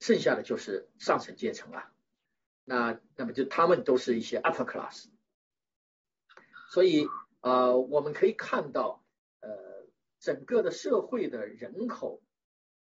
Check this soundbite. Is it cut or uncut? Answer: uncut